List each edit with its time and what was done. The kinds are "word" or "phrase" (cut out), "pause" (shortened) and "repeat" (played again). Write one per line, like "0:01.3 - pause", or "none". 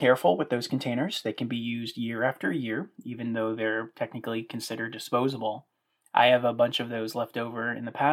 none

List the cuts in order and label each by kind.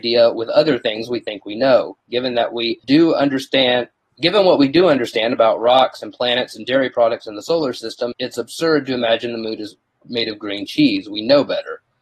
0:02.8 - pause
0:08.1 - word

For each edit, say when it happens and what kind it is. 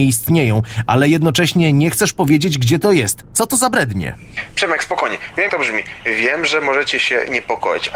0:05.5 - word

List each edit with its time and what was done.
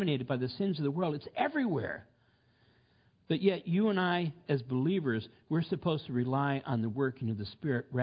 none

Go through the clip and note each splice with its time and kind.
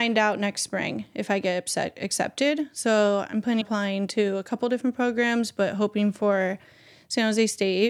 0:03.6 - word

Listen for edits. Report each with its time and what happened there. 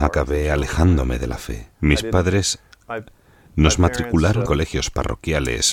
0:01.7 - pause
0:04.4 - word

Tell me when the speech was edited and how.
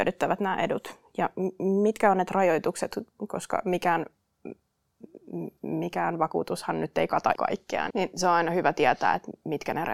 0:02.3 - word
0:07.3 - word
0:07.9 - word

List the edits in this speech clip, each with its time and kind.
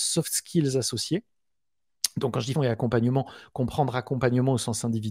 0:02.5 - word

